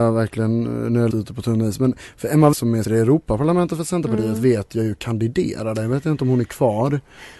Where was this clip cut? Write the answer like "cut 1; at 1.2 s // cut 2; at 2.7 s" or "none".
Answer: cut 1; at 1.1 s // cut 2; at 2.5 s // cut 3; at 2.8 s